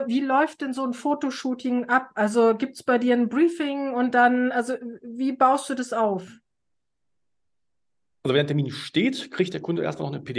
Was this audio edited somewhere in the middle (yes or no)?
no